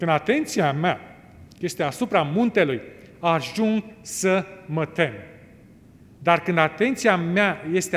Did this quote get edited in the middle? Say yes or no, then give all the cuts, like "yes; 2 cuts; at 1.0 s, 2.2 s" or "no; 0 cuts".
no; 0 cuts